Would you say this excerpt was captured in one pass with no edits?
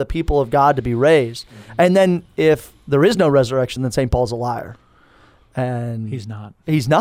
yes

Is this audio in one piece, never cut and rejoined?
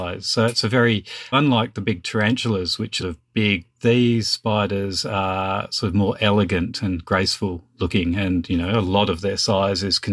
no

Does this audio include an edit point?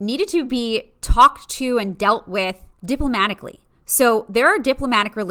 yes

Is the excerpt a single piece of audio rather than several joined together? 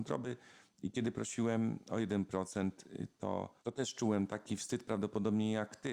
no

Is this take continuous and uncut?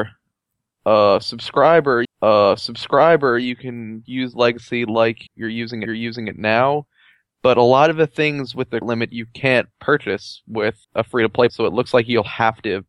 no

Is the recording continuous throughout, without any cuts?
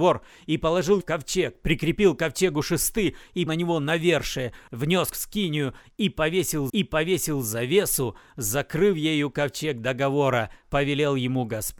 no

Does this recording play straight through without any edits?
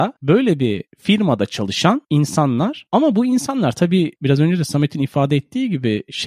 yes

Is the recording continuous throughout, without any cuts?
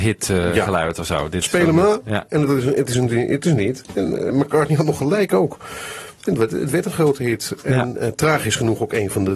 yes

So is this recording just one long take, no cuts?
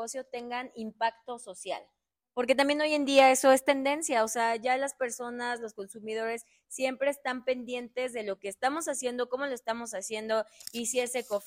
yes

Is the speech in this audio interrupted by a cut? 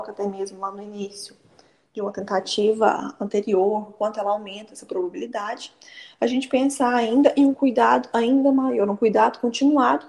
no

